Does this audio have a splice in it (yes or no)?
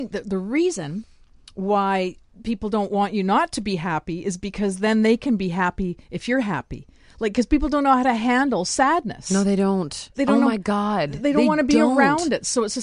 no